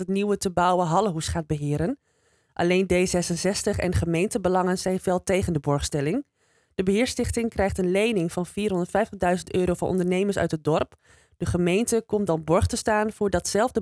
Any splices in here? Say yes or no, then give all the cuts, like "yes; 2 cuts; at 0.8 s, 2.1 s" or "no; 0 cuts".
no; 0 cuts